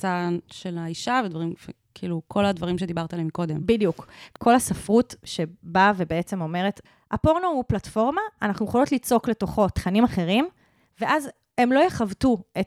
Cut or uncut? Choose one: uncut